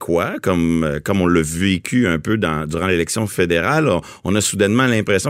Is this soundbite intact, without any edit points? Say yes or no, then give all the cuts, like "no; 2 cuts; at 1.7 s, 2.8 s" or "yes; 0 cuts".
yes; 0 cuts